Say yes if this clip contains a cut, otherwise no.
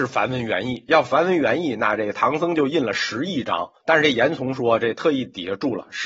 yes